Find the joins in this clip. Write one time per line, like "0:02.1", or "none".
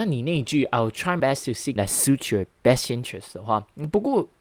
0:01.2
0:01.8